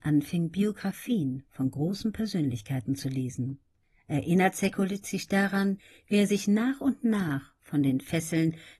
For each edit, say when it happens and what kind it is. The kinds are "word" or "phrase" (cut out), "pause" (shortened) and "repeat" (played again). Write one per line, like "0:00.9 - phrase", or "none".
none